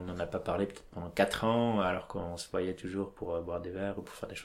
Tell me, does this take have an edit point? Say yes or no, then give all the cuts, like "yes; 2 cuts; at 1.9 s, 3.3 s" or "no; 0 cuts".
no; 0 cuts